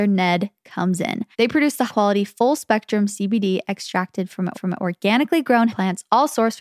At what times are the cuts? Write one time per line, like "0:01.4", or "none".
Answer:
0:01.3
0:01.9
0:04.5
0:05.7